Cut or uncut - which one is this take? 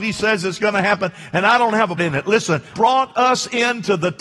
cut